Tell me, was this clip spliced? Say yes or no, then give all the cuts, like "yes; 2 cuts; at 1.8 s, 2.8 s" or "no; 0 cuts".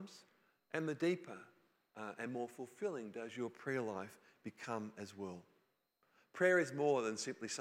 no; 0 cuts